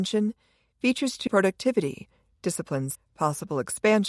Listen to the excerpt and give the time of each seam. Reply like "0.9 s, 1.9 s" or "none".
1.3 s, 2.9 s